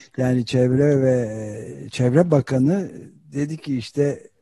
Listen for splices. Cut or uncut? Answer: uncut